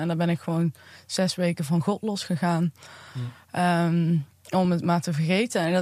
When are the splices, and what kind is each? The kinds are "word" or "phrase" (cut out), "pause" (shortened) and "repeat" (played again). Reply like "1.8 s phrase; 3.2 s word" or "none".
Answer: none